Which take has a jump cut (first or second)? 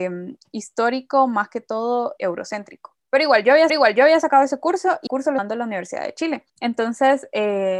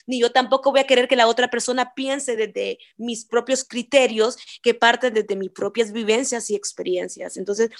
first